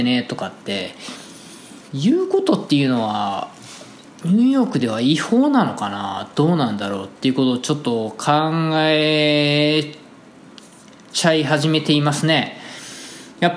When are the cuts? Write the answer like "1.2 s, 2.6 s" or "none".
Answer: 1.9 s